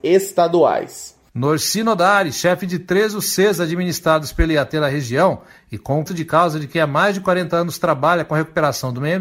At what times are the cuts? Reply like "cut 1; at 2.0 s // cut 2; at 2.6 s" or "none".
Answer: cut 1; at 6.1 s